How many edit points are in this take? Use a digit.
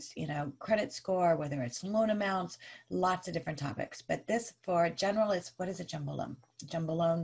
0